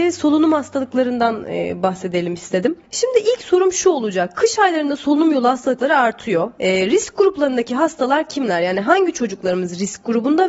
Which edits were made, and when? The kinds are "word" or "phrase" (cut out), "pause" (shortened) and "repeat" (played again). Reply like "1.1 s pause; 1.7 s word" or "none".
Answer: none